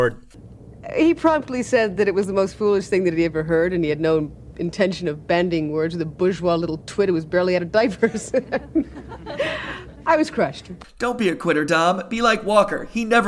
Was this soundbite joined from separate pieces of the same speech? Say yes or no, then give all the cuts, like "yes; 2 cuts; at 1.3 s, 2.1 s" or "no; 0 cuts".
no; 0 cuts